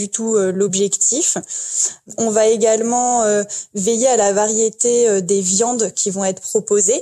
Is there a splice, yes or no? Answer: no